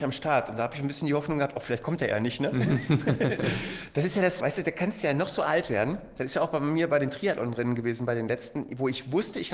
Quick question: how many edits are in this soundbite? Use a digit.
1